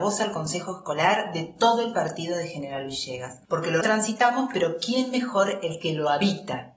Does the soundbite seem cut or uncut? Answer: cut